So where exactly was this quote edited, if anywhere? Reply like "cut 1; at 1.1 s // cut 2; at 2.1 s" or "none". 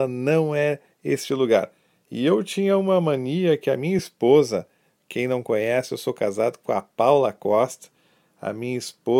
none